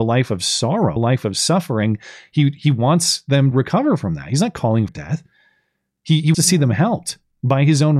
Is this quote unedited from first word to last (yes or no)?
no